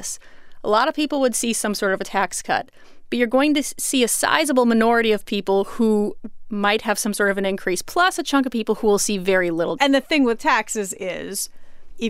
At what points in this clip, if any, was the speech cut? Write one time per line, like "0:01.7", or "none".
0:09.8